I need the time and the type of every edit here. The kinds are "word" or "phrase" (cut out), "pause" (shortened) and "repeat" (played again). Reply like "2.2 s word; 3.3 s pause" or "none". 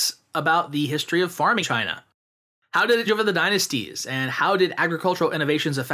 1.6 s word; 3.1 s word